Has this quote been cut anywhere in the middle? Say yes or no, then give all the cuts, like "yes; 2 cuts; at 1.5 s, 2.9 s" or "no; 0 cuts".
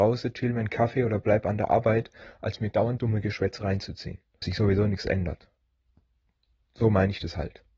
yes; 2 cuts; at 3.0 s, 4.4 s